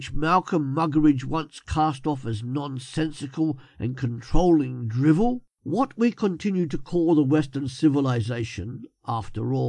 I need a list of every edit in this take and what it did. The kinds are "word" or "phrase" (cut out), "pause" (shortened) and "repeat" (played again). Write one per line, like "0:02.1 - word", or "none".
0:05.5 - pause